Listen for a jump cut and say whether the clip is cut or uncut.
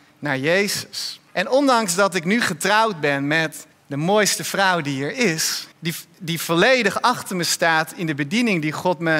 cut